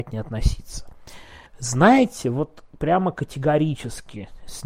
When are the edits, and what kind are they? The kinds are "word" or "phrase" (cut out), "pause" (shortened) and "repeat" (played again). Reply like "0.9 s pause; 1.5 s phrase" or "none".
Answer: 1.5 s pause